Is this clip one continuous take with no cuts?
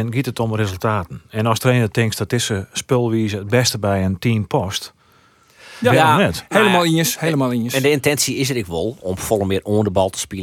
no; 1 cut; at 1.6 s

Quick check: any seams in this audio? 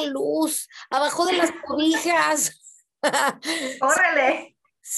no; 0 cuts

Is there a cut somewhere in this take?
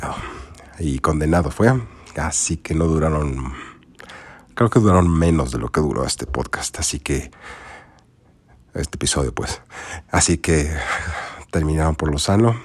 no; 0 cuts

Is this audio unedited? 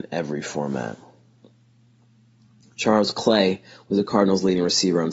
yes; 0 cuts

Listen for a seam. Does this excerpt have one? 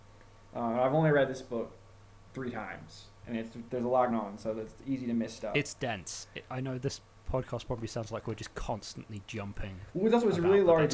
yes; 2 cuts; at 4.1 s, 6.5 s

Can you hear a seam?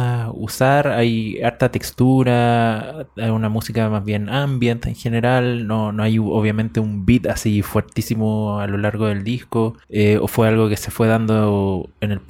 yes; 1 cut; at 9.8 s

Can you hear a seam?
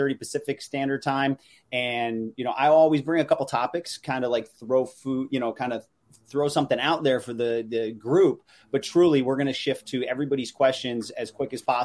no; 0 cuts

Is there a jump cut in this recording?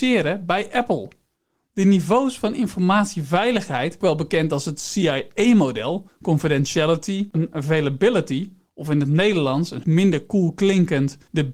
yes; 3 cuts; at 4.0 s, 7.3 s, 9.8 s

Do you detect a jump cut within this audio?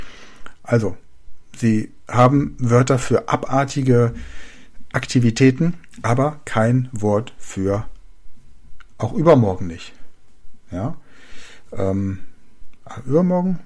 no; 0 cuts

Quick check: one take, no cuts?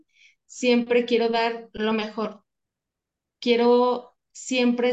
yes; 0 cuts

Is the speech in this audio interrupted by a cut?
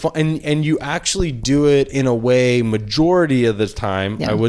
no; 0 cuts

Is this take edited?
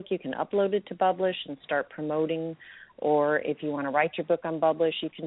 no; 0 cuts

